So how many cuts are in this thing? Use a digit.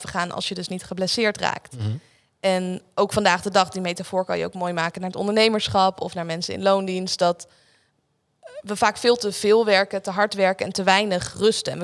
0